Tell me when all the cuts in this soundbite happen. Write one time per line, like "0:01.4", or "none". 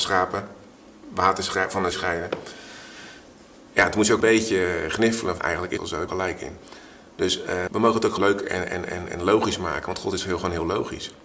0:01.9
0:04.2
0:05.4
0:05.8
0:06.1
0:07.7
0:08.2